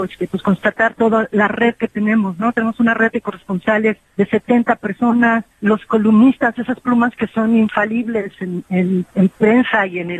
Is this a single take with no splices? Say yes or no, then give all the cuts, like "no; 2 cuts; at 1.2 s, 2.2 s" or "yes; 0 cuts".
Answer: no; 2 cuts; at 4.0 s, 5.5 s